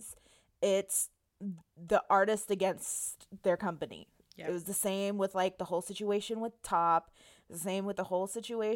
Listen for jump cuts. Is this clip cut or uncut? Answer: uncut